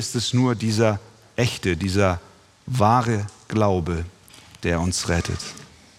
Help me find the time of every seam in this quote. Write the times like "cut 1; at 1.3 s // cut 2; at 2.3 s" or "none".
none

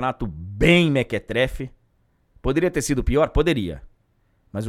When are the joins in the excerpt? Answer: none

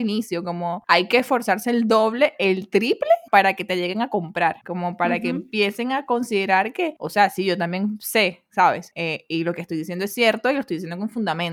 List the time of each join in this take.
none

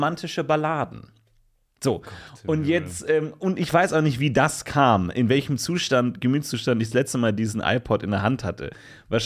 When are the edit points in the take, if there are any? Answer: none

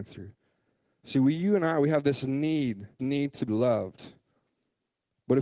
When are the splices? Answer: cut 1; at 3.0 s // cut 2; at 3.5 s

